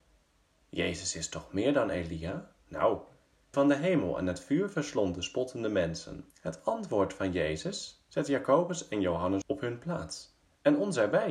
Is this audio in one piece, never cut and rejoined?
no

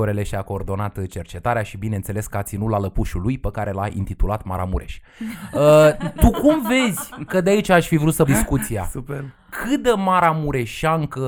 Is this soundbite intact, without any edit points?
no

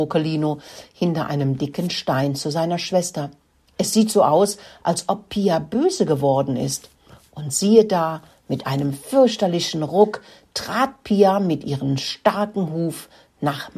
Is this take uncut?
yes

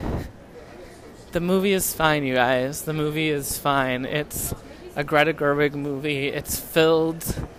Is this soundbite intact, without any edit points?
yes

